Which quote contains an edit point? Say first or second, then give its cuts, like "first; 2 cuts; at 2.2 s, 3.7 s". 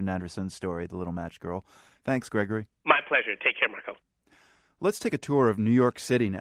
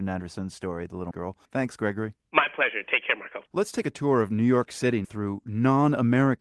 second; 4 cuts; at 1.1 s, 1.4 s, 3.5 s, 5.0 s